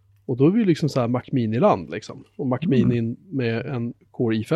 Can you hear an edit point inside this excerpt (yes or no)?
no